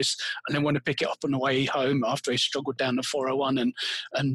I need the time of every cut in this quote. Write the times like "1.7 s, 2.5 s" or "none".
none